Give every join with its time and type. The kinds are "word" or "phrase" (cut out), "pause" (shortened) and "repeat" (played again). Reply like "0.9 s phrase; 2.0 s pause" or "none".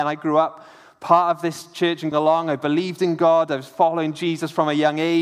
2.1 s word